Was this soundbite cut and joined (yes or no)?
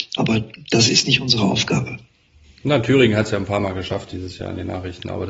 no